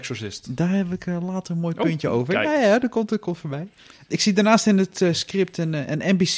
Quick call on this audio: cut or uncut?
uncut